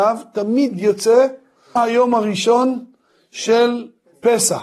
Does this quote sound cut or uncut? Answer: cut